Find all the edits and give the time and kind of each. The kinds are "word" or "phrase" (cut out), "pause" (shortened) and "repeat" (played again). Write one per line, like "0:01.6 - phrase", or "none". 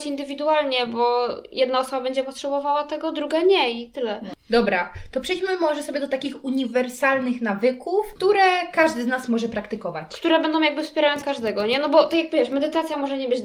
0:11.2 - word